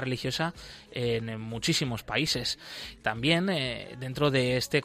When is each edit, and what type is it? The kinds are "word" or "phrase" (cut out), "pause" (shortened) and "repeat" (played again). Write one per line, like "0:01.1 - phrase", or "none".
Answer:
none